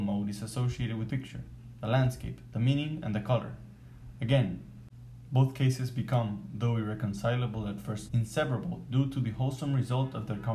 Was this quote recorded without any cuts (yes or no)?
no